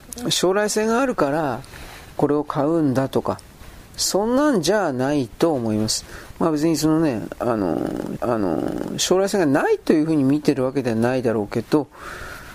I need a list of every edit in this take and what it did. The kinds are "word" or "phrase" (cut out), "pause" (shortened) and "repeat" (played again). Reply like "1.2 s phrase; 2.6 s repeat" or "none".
8.2 s repeat